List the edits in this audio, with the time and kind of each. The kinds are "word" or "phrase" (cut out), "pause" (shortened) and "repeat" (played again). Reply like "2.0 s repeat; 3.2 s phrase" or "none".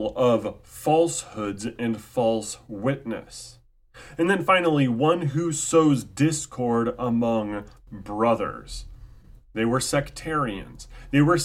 none